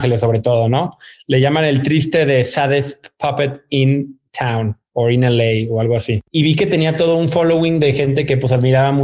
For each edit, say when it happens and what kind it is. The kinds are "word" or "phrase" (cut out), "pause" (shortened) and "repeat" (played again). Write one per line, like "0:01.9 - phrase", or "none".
0:06.3 - pause